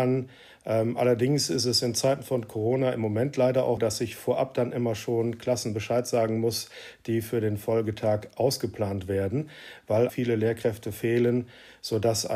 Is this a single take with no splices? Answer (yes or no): no